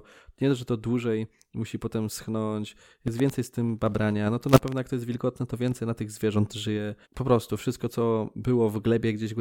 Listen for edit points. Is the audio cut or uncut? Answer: cut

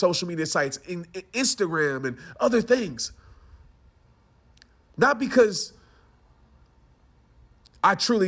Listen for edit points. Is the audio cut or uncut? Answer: uncut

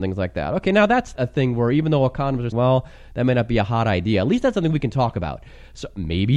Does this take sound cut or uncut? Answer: cut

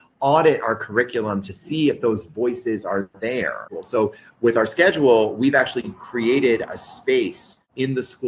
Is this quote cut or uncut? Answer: uncut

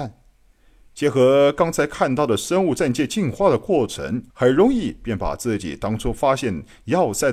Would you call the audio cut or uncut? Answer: cut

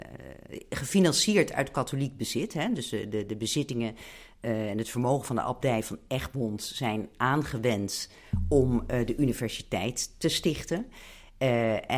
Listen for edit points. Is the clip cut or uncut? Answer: uncut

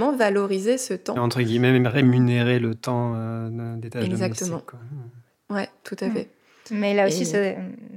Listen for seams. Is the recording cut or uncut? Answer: uncut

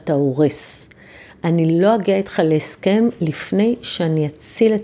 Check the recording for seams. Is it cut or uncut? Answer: uncut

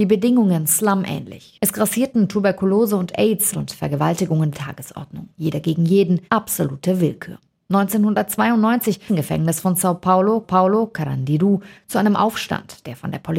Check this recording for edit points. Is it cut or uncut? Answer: cut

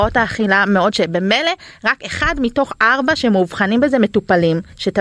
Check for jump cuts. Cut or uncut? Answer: cut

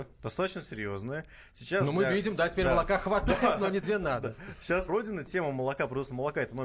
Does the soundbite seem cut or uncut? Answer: cut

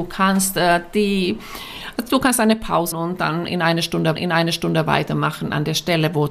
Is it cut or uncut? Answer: cut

